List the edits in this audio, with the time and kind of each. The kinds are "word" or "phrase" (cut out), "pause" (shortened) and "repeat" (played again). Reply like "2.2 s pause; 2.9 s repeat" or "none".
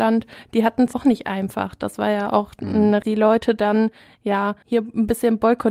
0.9 s word; 3.0 s phrase; 4.6 s pause